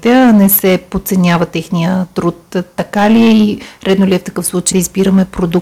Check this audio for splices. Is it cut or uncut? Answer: cut